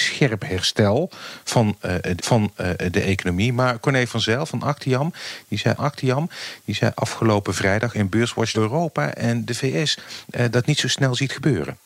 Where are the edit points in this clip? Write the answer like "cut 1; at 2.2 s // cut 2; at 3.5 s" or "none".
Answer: cut 1; at 2.2 s // cut 2; at 5.8 s // cut 3; at 8.5 s